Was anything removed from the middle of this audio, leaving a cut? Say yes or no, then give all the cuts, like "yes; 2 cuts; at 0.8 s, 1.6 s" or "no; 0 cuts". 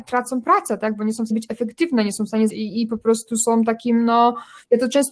yes; 2 cuts; at 1.3 s, 2.5 s